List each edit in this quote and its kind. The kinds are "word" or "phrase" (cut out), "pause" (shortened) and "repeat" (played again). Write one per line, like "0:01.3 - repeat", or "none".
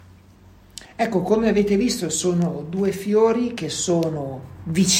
none

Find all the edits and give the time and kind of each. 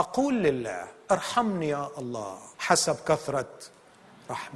0:02.5 - pause

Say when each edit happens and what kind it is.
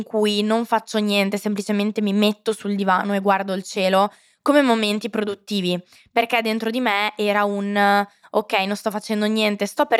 none

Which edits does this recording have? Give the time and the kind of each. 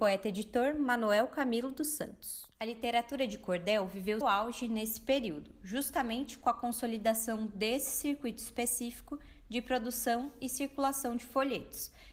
0:02.5 - pause
0:04.2 - word

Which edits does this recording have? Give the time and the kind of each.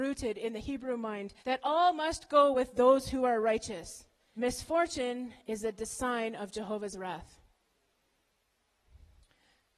0:01.4 - pause
0:02.5 - word
0:04.4 - word

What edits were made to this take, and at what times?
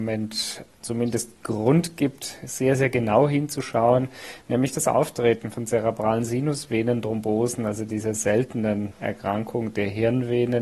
none

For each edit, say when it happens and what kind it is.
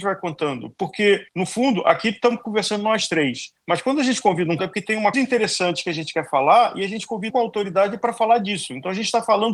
0:01.3 - pause
0:04.6 - word
0:05.1 - word
0:07.3 - word

